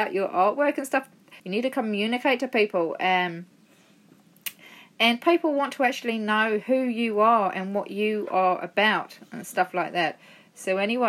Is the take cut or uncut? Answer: cut